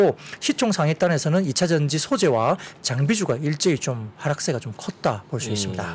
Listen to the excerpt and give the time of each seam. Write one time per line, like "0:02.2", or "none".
none